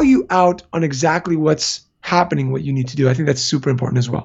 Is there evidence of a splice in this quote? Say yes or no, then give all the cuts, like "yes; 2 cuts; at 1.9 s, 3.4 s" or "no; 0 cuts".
no; 0 cuts